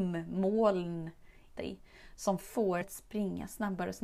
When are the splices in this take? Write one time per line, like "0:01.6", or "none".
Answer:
0:01.6
0:02.8